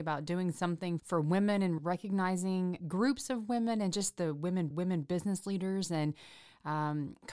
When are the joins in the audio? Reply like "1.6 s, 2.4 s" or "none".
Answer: 1.0 s, 1.8 s, 2.8 s, 4.7 s